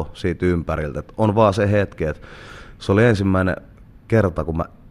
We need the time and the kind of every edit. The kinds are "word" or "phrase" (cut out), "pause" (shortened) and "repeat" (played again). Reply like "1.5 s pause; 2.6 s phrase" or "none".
none